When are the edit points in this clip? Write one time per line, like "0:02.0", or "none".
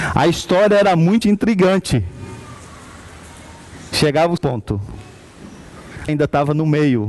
0:01.2
0:04.4
0:06.1